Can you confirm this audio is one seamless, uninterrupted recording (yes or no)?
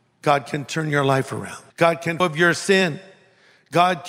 no